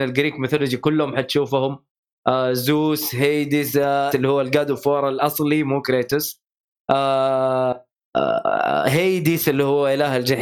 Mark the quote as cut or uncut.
cut